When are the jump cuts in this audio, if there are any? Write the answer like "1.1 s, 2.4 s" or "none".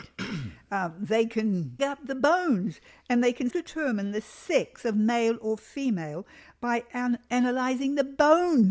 1.8 s, 3.5 s